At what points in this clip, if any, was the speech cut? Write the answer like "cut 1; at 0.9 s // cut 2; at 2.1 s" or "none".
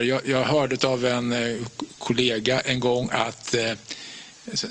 none